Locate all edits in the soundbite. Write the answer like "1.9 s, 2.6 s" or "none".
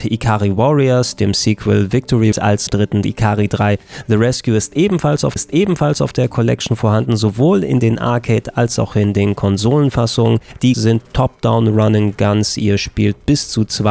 2.3 s, 2.7 s, 3.0 s, 5.4 s, 10.7 s